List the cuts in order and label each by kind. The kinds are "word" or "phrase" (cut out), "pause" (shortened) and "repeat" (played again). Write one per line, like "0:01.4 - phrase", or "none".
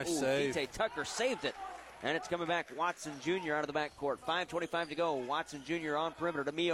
none